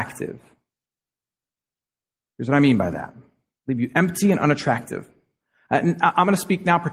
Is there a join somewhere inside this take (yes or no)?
no